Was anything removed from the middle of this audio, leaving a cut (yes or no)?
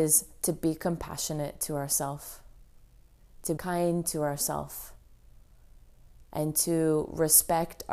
yes